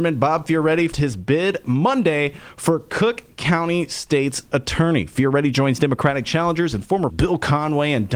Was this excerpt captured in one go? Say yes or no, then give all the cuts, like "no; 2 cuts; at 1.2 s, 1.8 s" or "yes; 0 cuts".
no; 2 cuts; at 0.9 s, 7.1 s